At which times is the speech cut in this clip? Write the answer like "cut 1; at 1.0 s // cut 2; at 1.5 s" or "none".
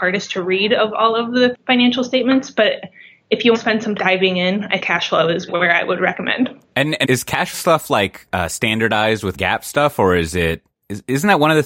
cut 1; at 1.5 s // cut 2; at 3.5 s // cut 3; at 4.0 s // cut 4; at 4.8 s // cut 5; at 5.5 s // cut 6; at 7.0 s // cut 7; at 7.5 s // cut 8; at 8.3 s // cut 9; at 9.3 s

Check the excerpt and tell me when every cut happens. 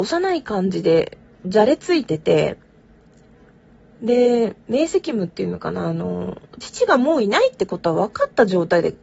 none

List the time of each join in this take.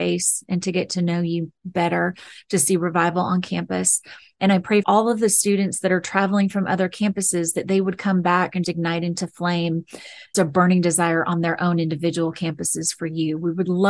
cut 1; at 4.8 s // cut 2; at 8.6 s // cut 3; at 10.3 s

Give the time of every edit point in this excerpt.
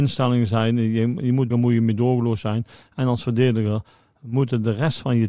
cut 1; at 1.5 s

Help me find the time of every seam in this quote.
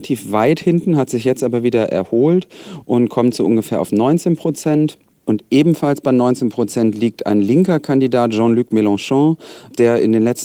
cut 1; at 5.0 s

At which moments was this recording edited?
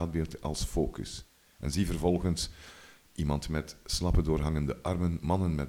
none

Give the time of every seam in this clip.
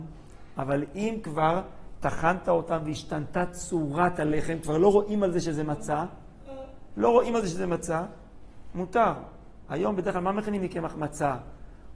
none

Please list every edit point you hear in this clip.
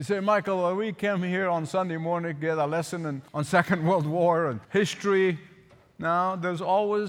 cut 1; at 3.3 s // cut 2; at 4.6 s

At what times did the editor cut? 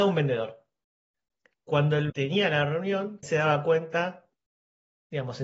cut 1; at 2.1 s // cut 2; at 3.2 s

